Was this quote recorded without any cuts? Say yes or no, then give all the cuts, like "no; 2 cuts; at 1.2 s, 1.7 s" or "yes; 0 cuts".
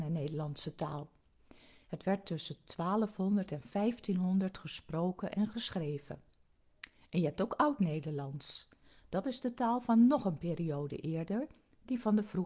yes; 0 cuts